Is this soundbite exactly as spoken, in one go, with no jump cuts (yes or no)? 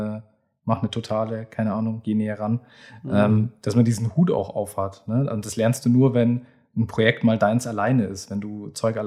yes